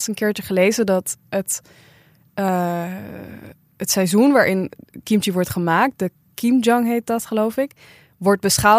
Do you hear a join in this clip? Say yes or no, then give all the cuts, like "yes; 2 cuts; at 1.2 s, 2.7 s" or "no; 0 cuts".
no; 0 cuts